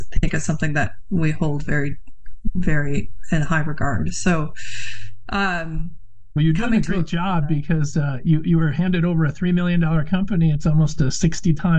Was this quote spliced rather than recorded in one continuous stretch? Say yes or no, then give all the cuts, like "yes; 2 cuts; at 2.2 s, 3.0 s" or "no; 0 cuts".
no; 0 cuts